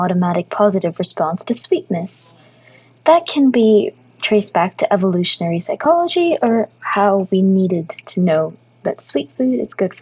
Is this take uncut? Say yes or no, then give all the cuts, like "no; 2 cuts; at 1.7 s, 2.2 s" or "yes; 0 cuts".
yes; 0 cuts